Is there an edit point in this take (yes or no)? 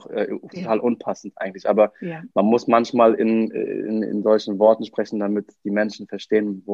no